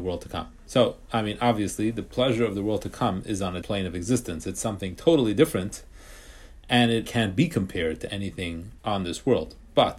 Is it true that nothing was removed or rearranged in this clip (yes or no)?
no